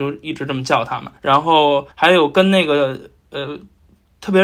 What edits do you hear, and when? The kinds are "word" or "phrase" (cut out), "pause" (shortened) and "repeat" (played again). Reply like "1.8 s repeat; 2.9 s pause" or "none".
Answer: 1.2 s pause; 1.9 s pause